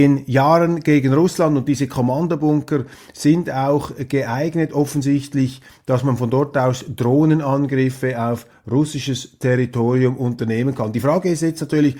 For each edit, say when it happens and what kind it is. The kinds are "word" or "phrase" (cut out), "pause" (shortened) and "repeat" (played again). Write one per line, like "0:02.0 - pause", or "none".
none